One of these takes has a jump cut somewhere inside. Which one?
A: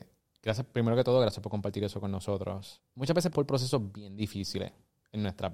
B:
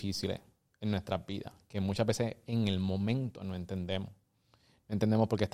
A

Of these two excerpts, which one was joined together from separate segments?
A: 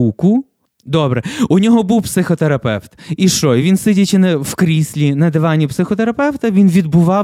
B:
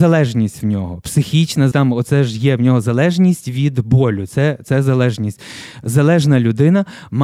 B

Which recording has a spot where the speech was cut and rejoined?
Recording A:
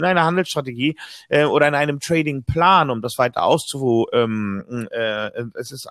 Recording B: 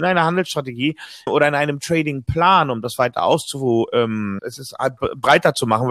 B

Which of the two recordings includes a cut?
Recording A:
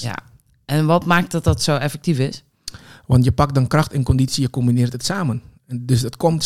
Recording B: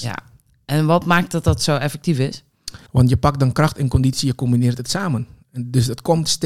B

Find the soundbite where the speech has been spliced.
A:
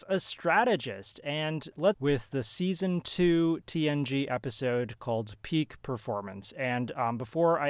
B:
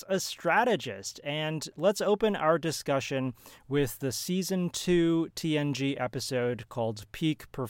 A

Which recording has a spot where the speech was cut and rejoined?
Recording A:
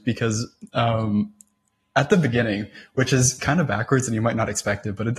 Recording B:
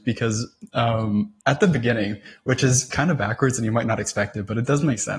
B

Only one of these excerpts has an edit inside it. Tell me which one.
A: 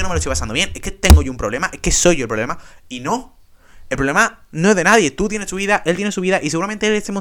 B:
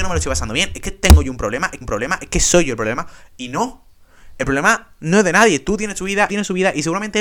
B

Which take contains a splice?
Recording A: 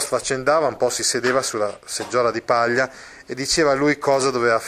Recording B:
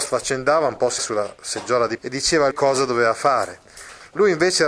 B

